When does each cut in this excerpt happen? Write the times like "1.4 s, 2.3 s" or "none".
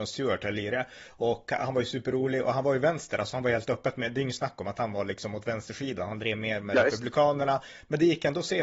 none